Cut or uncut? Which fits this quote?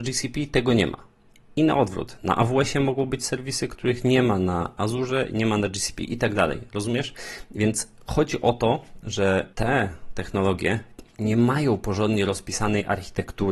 cut